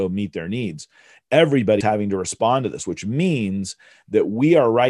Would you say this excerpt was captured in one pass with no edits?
no; 1 cut; at 1.8 s

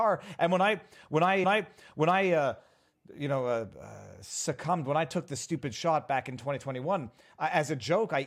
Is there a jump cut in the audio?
yes; 1 cut; at 1.4 s

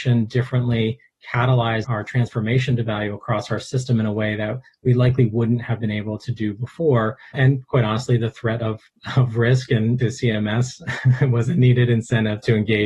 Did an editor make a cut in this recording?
yes; 2 cuts; at 1.8 s, 10.0 s

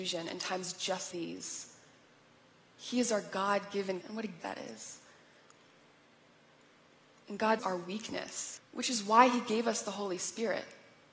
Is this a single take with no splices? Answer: no; 5 cuts; at 1.1 s, 4.0 s, 4.4 s, 7.6 s, 8.6 s

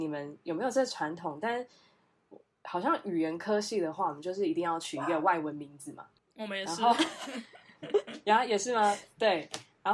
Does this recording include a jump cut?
yes; 1 cut; at 6.2 s

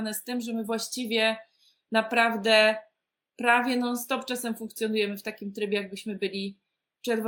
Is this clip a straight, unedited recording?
yes; 0 cuts

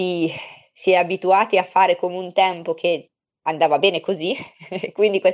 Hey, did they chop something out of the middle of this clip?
no; 0 cuts

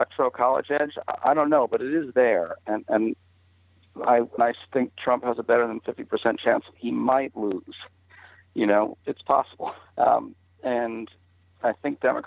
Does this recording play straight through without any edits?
no; 4 cuts; at 4.4 s, 6.8 s, 9.0 s, 9.9 s

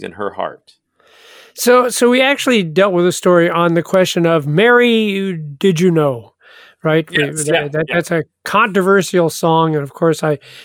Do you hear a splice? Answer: no; 0 cuts

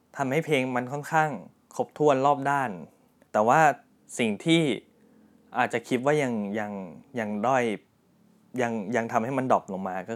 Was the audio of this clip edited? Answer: no; 0 cuts

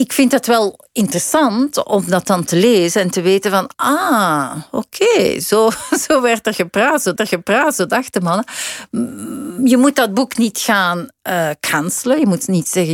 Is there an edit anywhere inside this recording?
yes; 2 cuts; at 3.7 s, 7.2 s

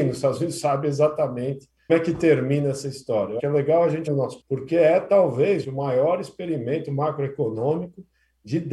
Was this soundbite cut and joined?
yes; 5 cuts; at 1.9 s, 3.4 s, 4.1 s, 4.4 s, 5.6 s

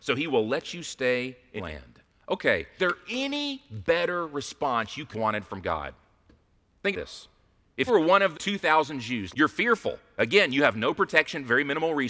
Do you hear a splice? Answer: yes; 7 cuts; at 1.6 s, 2.8 s, 5.1 s, 6.9 s, 7.9 s, 8.3 s, 9.3 s

